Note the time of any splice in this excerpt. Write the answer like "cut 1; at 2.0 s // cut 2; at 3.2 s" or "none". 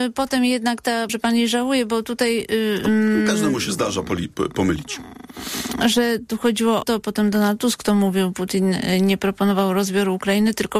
cut 1; at 1.1 s // cut 2; at 6.8 s